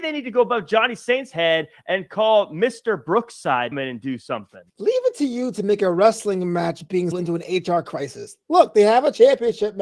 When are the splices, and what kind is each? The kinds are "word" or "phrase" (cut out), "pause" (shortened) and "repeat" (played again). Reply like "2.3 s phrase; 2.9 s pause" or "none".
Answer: 3.7 s phrase; 4.7 s pause; 7.1 s word

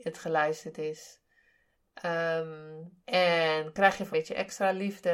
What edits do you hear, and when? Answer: 3.0 s pause; 4.1 s phrase

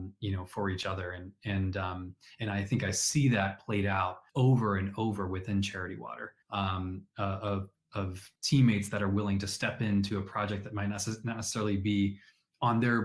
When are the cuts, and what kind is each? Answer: 4.3 s pause; 6.4 s pause; 8.4 s pause

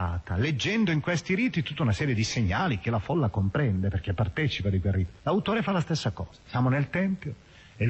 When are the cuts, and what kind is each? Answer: 5.2 s pause

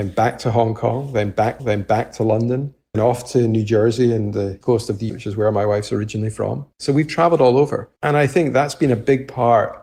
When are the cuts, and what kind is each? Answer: 1.6 s repeat; 2.9 s word; 4.6 s word; 5.1 s word; 6.7 s pause; 8.0 s pause

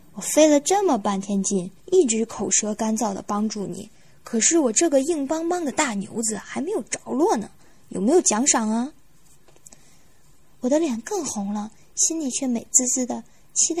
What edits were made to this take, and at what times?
1.8 s pause

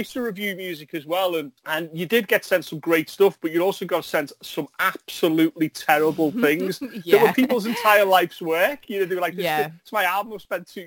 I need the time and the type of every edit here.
1.6 s pause

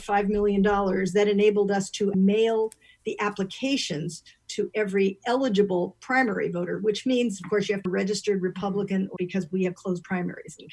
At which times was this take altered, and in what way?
2.1 s word; 7.9 s phrase; 9.2 s word

